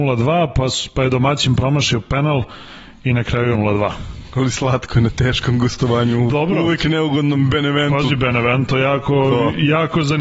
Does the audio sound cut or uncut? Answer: cut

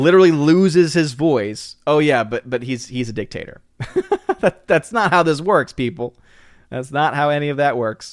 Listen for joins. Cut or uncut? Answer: uncut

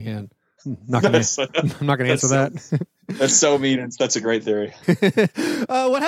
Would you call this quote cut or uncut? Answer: uncut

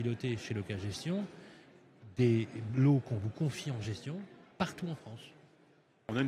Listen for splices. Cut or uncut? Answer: uncut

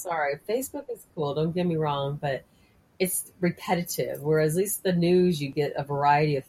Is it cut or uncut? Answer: uncut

